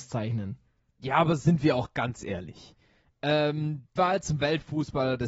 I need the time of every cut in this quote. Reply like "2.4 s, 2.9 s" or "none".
4.0 s